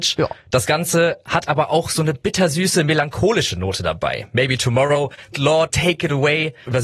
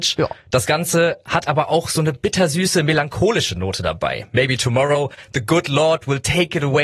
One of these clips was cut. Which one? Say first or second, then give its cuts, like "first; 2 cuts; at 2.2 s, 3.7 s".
first; 2 cuts; at 5.3 s, 5.7 s